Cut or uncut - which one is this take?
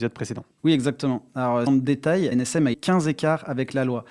cut